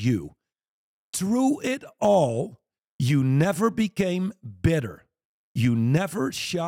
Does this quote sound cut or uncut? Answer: uncut